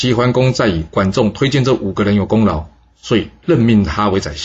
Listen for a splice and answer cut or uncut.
uncut